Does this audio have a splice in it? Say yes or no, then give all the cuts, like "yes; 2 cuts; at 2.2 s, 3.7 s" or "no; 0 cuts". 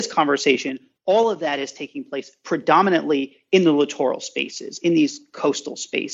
no; 0 cuts